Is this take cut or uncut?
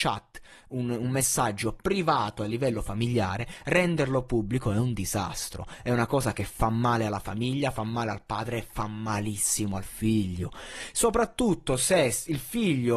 uncut